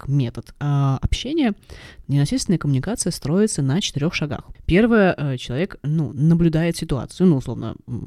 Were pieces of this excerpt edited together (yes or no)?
no